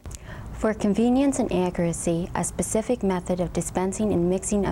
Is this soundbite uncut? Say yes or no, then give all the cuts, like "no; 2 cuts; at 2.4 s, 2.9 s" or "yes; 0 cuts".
yes; 0 cuts